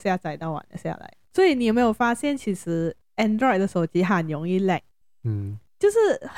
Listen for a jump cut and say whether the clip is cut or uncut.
uncut